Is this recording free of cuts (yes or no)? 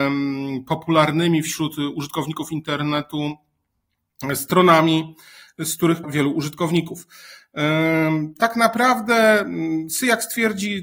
no